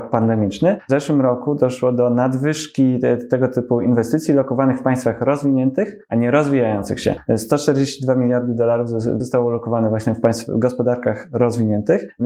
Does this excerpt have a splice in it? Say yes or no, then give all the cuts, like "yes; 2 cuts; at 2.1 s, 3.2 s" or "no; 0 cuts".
yes; 1 cut; at 9.2 s